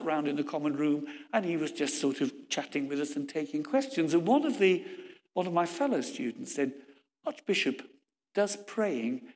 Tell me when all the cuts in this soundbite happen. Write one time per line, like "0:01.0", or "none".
none